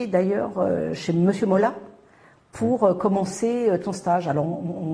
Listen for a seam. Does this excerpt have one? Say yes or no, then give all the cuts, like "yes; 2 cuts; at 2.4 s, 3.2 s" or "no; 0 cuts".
no; 0 cuts